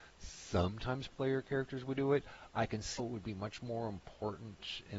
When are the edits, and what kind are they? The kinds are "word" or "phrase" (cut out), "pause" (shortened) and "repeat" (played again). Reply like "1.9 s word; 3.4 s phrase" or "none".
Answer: 3.0 s word